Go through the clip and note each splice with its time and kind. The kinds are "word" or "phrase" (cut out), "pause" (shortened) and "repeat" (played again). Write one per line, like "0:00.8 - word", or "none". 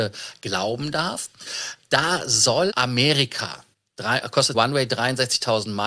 0:02.7 - phrase
0:03.7 - pause
0:04.5 - word